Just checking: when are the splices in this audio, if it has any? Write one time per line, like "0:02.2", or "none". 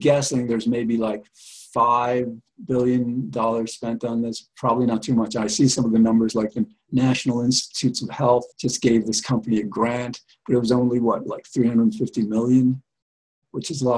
0:08.5